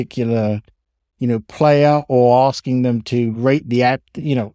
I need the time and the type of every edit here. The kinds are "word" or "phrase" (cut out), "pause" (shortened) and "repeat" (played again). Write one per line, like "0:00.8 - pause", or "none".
none